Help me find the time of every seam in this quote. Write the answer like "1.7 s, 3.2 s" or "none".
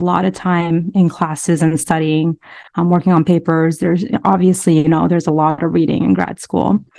2.7 s